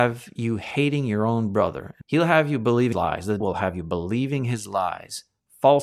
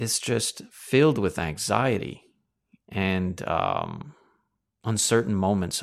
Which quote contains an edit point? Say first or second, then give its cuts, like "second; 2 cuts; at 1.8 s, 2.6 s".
first; 3 cuts; at 2.0 s, 2.9 s, 3.4 s